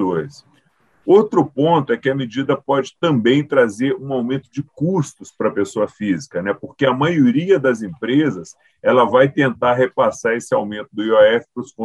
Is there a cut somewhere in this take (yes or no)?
no